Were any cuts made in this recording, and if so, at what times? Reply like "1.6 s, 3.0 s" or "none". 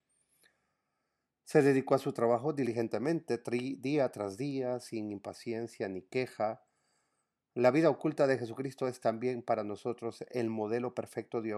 none